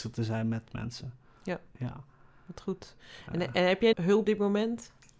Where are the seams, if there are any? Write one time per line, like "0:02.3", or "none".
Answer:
0:03.9
0:04.2